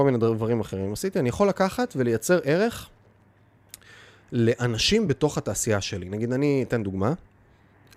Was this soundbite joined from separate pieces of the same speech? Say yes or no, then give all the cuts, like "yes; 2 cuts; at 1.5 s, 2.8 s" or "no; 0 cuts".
no; 0 cuts